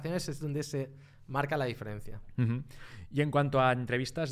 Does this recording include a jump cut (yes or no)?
no